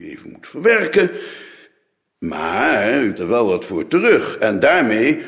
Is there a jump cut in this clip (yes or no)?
yes